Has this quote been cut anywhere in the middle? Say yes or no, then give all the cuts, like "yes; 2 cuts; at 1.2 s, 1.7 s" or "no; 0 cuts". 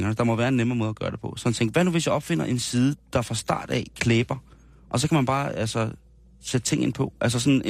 no; 0 cuts